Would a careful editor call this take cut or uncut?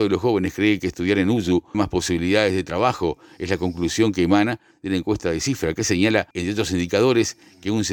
cut